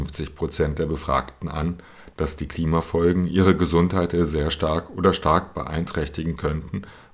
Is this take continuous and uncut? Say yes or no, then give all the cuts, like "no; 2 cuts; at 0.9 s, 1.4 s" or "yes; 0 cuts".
yes; 0 cuts